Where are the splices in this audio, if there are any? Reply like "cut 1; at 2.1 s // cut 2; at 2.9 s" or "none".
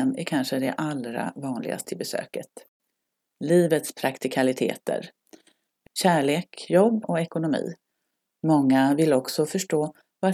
cut 1; at 1.8 s // cut 2; at 5.9 s // cut 3; at 7.0 s